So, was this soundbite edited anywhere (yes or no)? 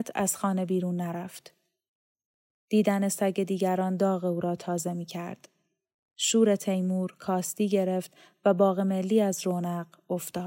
no